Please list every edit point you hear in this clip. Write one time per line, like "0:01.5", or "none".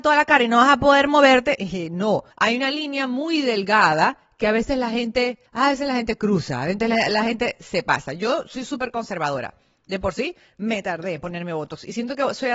0:02.3
0:05.5